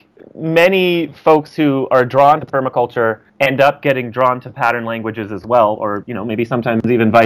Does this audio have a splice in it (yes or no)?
yes